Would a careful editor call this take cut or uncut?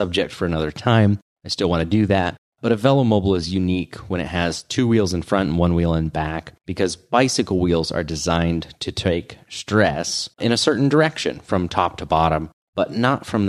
cut